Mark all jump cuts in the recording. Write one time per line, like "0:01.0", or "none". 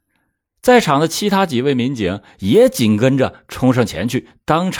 none